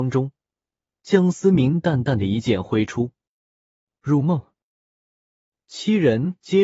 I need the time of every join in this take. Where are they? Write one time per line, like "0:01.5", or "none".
none

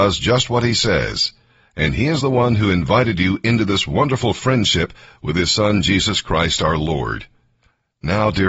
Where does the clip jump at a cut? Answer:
none

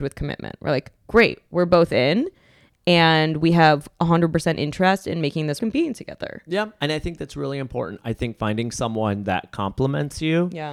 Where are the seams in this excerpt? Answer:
0:05.6

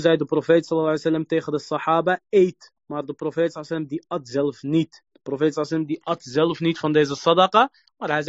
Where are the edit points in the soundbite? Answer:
0:02.8
0:05.1

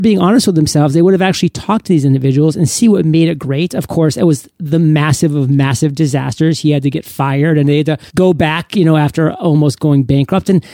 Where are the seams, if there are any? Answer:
0:08.1

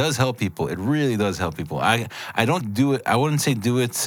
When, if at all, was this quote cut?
0:02.6

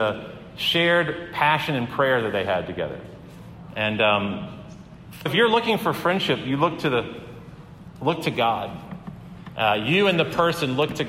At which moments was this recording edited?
0:05.3

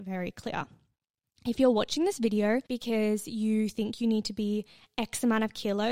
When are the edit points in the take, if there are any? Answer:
0:02.7

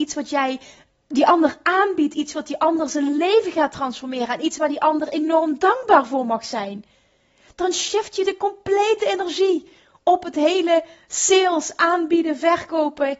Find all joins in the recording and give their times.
none

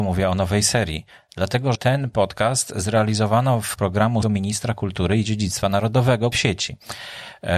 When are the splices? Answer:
0:01.7
0:03.7
0:04.2
0:06.3

